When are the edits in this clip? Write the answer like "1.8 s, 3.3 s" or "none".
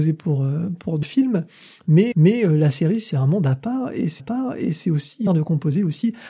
1.0 s, 2.1 s, 3.1 s, 4.2 s, 5.3 s